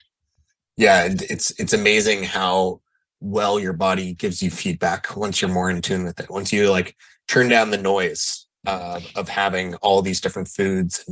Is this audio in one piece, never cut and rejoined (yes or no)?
yes